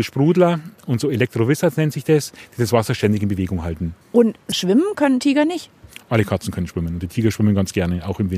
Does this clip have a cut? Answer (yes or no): yes